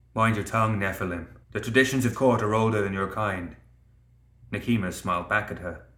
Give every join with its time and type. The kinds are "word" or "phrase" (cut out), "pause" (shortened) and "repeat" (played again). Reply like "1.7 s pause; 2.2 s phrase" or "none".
1.4 s pause; 2.1 s word